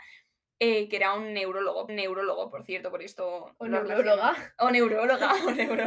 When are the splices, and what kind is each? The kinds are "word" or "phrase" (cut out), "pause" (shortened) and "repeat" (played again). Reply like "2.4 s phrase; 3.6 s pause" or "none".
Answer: 1.9 s repeat